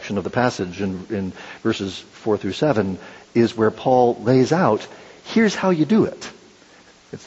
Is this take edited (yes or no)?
no